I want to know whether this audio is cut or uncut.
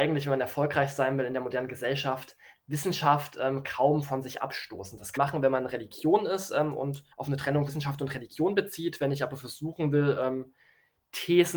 cut